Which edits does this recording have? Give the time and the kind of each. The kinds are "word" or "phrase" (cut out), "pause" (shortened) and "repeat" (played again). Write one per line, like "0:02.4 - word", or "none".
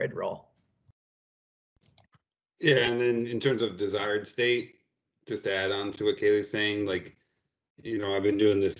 none